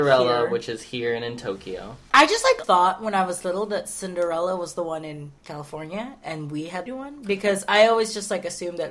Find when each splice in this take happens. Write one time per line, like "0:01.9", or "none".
0:02.6
0:05.4
0:06.9